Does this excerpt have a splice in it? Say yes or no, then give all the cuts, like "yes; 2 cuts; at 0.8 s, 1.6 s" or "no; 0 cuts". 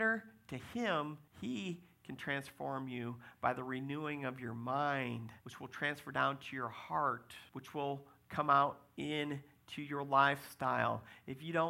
yes; 3 cuts; at 1.3 s, 5.4 s, 7.5 s